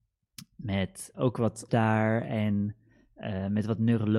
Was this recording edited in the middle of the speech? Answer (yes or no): yes